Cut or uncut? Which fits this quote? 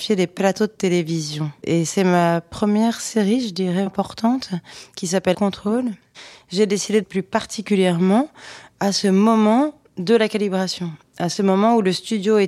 cut